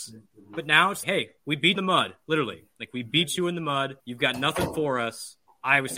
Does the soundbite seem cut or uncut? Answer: cut